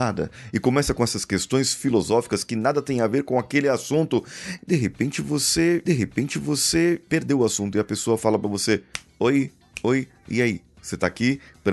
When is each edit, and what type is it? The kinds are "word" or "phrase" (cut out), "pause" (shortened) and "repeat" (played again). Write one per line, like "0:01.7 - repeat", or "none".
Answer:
0:05.9 - repeat